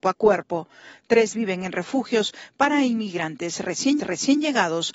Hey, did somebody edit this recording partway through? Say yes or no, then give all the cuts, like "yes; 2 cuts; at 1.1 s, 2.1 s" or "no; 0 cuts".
yes; 2 cuts; at 1.3 s, 4.0 s